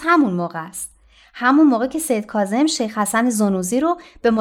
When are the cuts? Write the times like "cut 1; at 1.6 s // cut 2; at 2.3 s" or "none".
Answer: none